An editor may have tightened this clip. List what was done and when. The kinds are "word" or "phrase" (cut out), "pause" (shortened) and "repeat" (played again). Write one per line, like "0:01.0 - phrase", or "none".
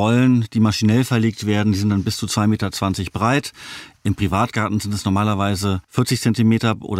0:05.8 - pause